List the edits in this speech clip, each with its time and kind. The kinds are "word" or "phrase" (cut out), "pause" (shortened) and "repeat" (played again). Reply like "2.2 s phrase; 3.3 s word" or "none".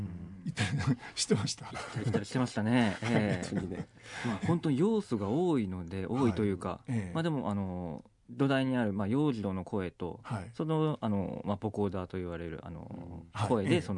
none